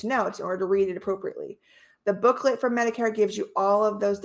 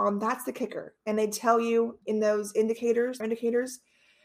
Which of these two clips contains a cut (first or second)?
second